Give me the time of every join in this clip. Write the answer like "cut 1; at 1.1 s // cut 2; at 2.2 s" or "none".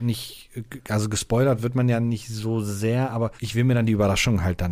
cut 1; at 3.4 s